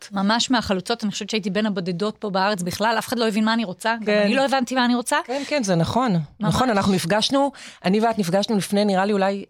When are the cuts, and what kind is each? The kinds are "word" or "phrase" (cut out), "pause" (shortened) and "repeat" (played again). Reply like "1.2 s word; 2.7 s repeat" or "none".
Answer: 5.5 s word